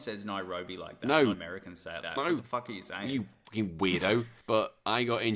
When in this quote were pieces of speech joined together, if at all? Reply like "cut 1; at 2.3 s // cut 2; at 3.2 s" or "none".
cut 1; at 1.3 s // cut 2; at 2.0 s // cut 3; at 4.4 s